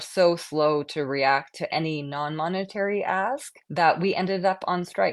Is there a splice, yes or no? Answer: yes